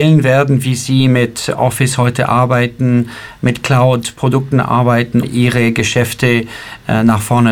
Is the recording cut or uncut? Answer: cut